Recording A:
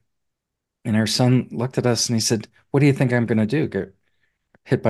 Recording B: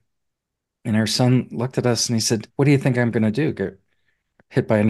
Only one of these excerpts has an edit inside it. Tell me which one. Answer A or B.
B